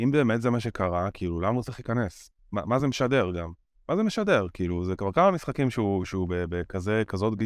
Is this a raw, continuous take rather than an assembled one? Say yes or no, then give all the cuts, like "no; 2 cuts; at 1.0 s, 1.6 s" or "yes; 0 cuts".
yes; 0 cuts